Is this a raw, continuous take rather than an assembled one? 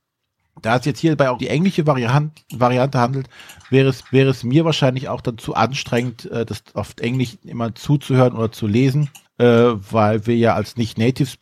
no; 3 cuts; at 1.4 s, 4.0 s, 9.3 s

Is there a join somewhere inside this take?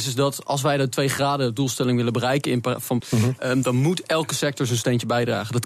yes; 1 cut; at 3.0 s

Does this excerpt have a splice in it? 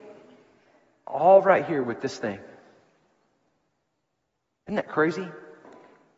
no; 0 cuts

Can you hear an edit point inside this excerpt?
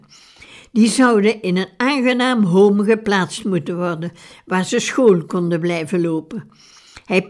no; 0 cuts

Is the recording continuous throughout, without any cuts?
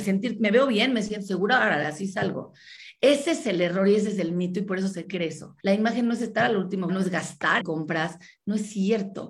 no; 3 cuts; at 5.6 s, 6.9 s, 7.6 s

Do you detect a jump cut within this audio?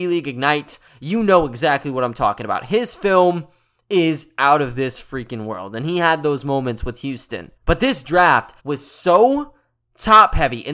yes; 2 cuts; at 7.6 s, 8.6 s

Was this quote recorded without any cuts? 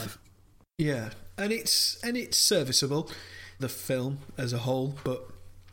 no; 1 cut; at 3.6 s

